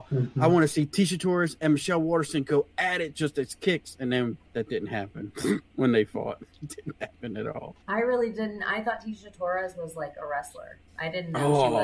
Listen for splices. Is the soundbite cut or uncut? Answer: cut